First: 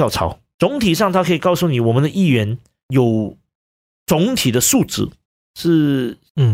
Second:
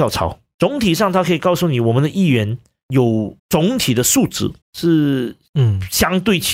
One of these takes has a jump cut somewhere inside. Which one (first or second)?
second